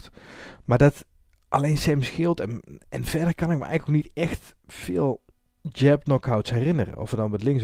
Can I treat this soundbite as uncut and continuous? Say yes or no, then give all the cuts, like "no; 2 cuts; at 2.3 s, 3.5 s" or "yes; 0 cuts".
yes; 0 cuts